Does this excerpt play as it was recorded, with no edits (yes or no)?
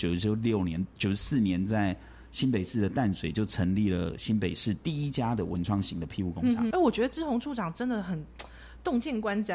no